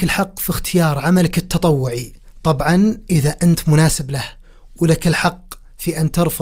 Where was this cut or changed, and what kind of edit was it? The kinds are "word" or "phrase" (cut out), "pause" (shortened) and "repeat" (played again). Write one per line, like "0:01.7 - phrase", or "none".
none